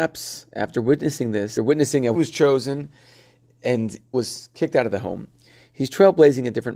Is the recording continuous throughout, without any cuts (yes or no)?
no